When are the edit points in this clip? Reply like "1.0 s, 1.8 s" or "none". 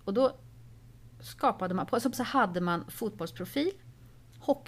2.1 s